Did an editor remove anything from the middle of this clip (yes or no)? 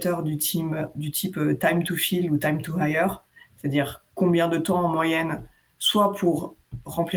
no